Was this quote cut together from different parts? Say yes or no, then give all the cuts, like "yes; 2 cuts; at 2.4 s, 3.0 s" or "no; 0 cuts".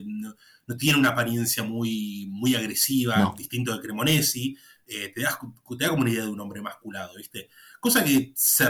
no; 0 cuts